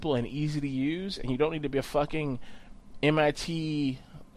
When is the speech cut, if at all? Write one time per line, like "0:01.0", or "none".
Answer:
none